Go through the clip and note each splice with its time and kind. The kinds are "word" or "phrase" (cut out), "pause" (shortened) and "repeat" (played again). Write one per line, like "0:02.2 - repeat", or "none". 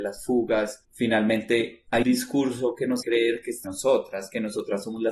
0:02.0 - word
0:03.0 - word
0:03.6 - word